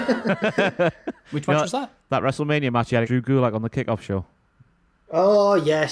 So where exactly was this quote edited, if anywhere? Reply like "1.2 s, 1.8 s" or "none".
3.0 s